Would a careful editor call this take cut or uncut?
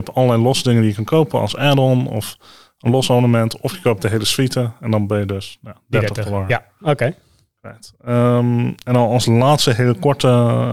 uncut